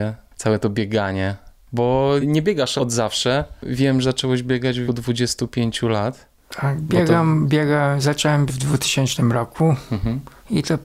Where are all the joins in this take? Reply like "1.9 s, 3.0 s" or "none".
2.2 s, 4.0 s, 4.9 s, 8.5 s